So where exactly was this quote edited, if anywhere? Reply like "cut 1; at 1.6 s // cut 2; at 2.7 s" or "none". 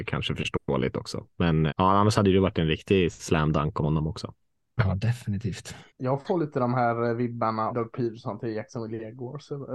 cut 1; at 1.7 s // cut 2; at 3.8 s // cut 3; at 5.9 s // cut 4; at 7.7 s